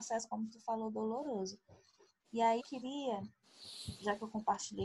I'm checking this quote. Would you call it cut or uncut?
cut